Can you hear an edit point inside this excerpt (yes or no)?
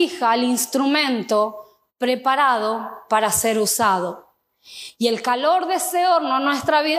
no